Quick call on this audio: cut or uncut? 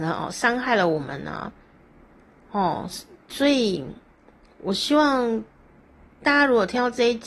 uncut